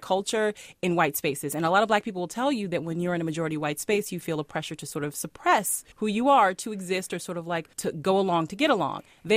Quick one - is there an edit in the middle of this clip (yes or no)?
yes